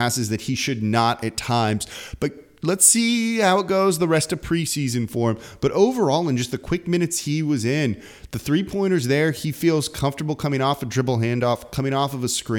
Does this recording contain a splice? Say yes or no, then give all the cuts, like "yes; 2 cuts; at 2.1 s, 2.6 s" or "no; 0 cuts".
no; 0 cuts